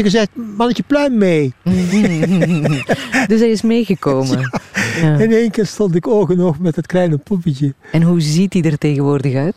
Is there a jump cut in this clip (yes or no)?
no